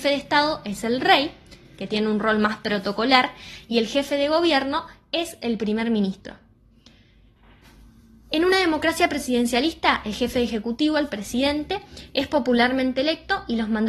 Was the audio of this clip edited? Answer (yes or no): no